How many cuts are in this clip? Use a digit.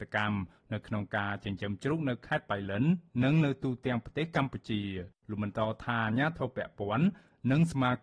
1